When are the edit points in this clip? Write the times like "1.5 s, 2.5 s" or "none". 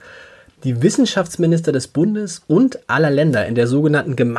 none